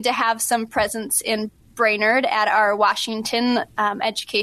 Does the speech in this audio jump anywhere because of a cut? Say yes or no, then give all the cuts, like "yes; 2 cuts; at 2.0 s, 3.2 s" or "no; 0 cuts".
no; 0 cuts